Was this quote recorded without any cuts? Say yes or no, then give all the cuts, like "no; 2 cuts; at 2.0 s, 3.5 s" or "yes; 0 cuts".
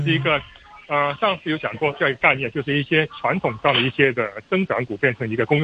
yes; 0 cuts